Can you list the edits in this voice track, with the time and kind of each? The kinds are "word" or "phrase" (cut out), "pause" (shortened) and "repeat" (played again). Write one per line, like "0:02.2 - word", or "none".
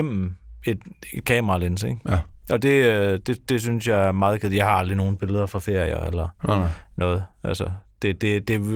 0:07.3 - pause